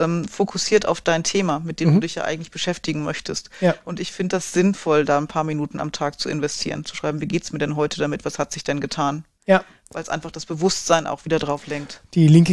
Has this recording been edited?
no; 0 cuts

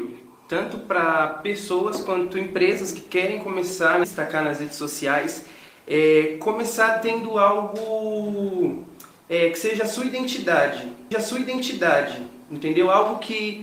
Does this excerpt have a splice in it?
yes; 2 cuts; at 4.0 s, 11.1 s

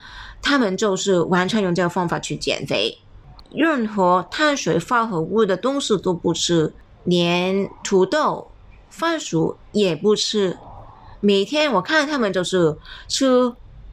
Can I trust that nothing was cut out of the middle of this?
no; 1 cut; at 6.9 s

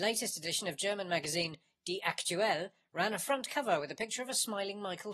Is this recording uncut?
yes; 0 cuts

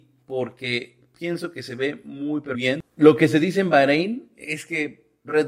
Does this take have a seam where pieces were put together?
yes; 1 cut; at 2.5 s

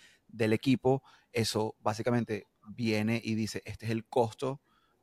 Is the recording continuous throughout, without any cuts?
yes; 0 cuts

